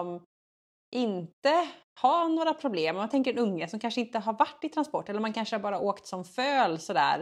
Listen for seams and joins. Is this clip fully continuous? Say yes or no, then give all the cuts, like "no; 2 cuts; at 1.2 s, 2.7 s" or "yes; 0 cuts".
yes; 0 cuts